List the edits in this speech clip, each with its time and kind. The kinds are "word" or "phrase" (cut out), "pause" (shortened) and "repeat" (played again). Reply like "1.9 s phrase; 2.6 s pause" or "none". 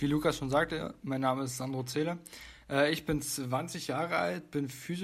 none